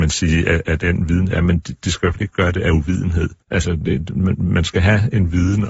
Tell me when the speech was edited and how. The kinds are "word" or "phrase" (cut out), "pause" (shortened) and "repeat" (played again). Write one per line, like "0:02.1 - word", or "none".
0:03.4 - pause